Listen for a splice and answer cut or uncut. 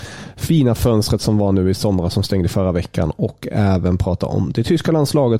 uncut